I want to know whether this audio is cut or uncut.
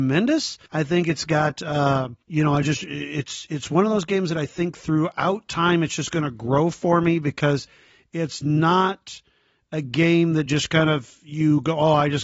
uncut